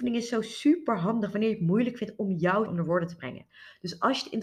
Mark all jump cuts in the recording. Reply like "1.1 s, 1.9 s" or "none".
2.7 s